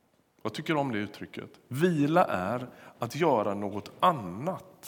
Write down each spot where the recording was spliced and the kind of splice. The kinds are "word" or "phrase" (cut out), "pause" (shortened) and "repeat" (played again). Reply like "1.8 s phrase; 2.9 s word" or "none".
none